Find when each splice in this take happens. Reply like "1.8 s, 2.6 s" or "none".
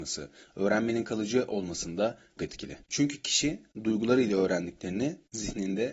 2.4 s, 2.8 s